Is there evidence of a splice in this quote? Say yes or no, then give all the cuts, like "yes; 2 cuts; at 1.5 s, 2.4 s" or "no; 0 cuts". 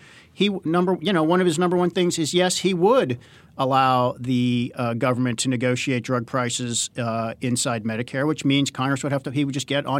no; 0 cuts